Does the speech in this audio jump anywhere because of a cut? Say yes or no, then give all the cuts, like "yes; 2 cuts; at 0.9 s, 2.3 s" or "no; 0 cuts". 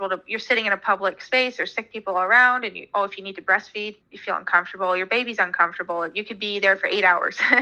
yes; 1 cut; at 4.0 s